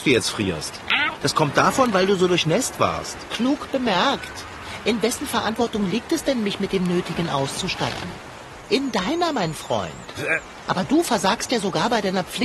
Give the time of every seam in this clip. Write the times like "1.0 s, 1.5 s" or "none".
none